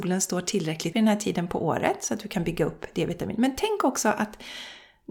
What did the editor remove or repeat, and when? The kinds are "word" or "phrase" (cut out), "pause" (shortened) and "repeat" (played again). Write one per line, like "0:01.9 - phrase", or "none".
0:00.9 - word